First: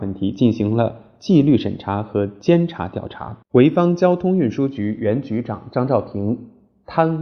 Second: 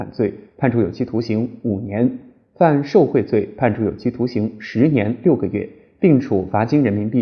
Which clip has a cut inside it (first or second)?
first